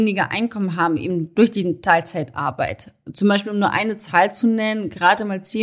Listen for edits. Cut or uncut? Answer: uncut